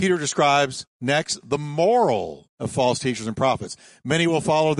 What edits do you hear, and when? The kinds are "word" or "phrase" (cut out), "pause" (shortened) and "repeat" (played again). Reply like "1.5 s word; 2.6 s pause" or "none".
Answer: 2.5 s word